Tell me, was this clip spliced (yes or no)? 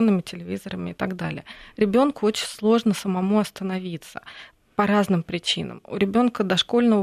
no